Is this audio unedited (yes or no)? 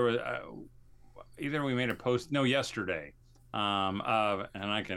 yes